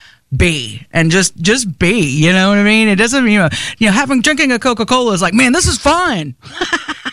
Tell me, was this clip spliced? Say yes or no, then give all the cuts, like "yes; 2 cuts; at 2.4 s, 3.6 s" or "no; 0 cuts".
no; 0 cuts